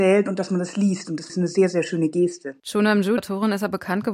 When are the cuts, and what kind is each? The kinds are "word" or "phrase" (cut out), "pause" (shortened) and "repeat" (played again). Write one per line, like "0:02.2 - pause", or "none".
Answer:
0:01.3 - phrase
0:02.6 - pause
0:03.2 - word